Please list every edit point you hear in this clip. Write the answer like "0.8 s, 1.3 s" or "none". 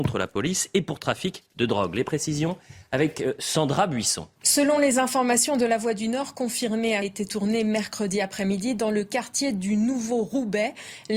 4.4 s, 7.0 s